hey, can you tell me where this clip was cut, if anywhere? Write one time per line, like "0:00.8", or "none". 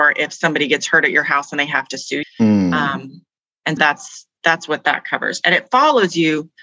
0:02.2
0:03.8